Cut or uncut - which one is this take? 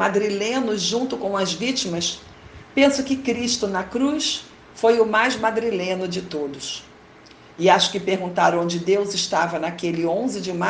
uncut